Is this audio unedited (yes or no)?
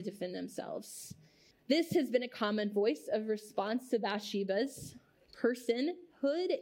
no